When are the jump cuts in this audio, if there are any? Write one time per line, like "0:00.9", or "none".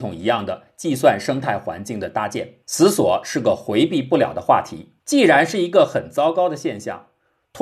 0:02.6
0:05.0